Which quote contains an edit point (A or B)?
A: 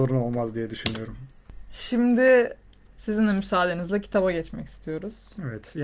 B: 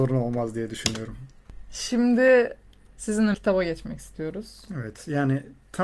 B